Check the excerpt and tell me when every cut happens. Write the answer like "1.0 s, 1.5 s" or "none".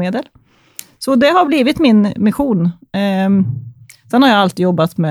none